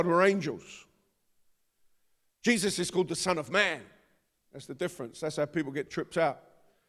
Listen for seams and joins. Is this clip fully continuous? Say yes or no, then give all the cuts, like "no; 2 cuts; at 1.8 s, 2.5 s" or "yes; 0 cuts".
yes; 0 cuts